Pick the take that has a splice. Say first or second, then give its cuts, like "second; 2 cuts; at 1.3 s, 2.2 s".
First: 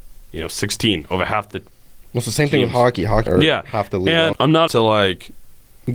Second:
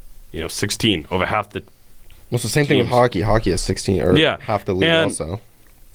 first; 4 cuts; at 2.1 s, 3.3 s, 4.3 s, 4.7 s